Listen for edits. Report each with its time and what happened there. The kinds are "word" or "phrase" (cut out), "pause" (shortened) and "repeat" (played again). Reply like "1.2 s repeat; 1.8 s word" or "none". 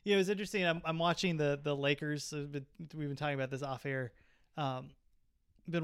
none